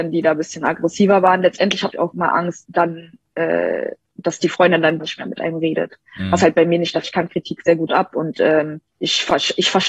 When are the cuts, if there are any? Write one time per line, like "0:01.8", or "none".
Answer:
0:01.9
0:02.6
0:05.0
0:07.0
0:08.9